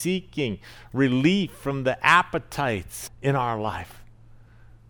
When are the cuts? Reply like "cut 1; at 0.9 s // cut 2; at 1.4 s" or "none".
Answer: cut 1; at 3.1 s